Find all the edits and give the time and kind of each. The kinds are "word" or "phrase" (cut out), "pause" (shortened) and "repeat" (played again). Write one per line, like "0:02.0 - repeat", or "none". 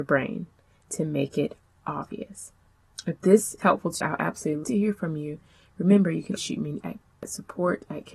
0:03.6 - word
0:04.0 - word
0:04.6 - word
0:06.4 - word
0:06.8 - word